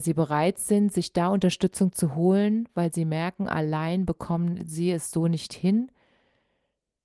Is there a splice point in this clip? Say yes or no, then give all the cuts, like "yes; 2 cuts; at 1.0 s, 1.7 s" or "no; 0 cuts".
no; 0 cuts